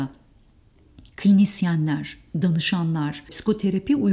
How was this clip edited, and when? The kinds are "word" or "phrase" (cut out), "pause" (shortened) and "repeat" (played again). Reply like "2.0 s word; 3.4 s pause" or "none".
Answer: none